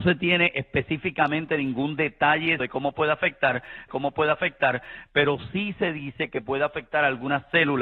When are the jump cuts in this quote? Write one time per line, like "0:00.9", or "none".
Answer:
0:02.6
0:03.9

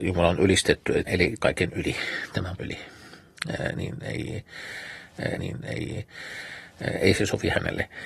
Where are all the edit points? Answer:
0:01.1
0:01.4
0:02.6
0:05.4

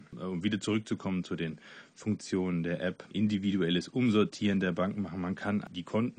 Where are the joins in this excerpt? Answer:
0:03.1

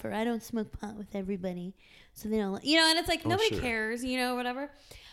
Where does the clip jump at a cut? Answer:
none

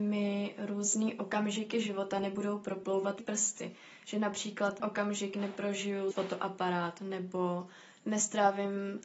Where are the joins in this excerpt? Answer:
0:03.2
0:04.8
0:06.1

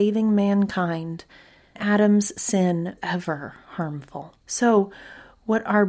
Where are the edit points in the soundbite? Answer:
0:01.8
0:03.0
0:04.4

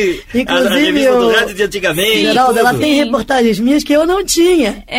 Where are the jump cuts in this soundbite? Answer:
none

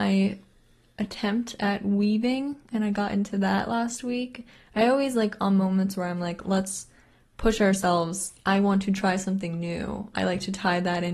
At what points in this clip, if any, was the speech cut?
none

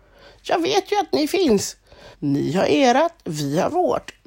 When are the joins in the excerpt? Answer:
0:02.1

